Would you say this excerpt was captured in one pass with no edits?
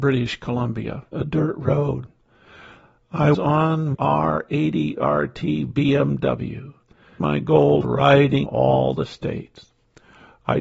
no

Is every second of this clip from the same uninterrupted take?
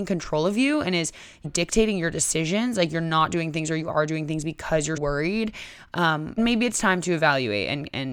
no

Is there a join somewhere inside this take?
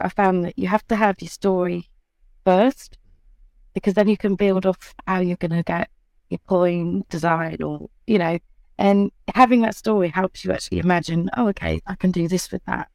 no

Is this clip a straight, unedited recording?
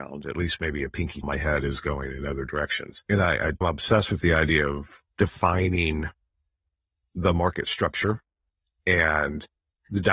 no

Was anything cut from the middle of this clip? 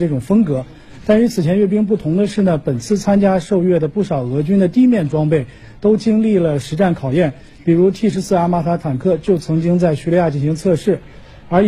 no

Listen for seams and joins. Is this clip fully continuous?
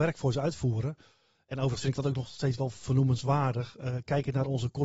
yes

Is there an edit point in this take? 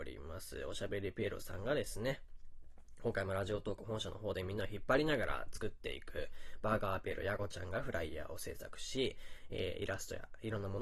no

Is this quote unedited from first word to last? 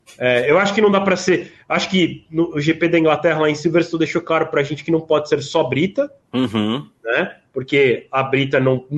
no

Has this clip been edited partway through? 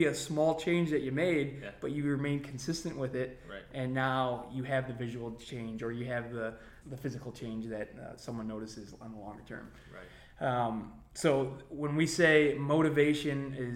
yes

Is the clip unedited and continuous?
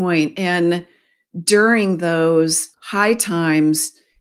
no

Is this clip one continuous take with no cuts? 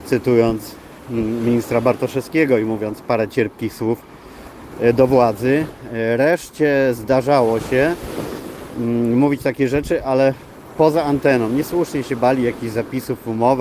yes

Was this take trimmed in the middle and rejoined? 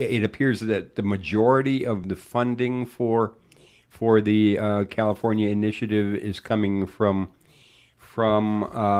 no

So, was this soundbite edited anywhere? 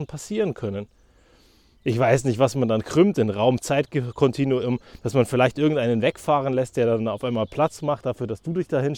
no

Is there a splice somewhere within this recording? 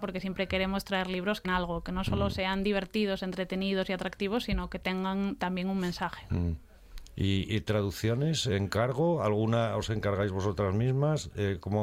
yes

